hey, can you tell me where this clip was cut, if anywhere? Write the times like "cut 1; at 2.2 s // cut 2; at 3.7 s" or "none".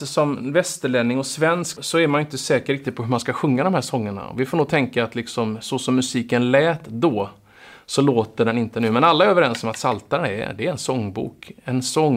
cut 1; at 1.8 s